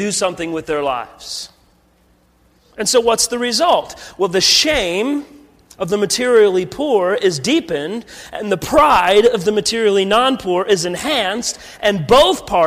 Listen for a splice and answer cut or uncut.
uncut